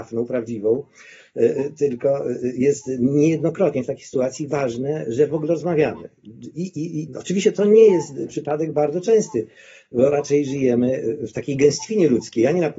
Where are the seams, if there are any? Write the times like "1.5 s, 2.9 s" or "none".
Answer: none